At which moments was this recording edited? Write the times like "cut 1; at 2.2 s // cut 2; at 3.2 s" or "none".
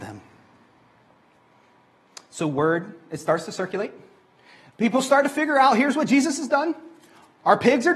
none